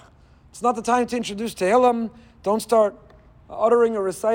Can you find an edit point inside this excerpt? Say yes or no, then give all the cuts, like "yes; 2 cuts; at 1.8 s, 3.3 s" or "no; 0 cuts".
no; 0 cuts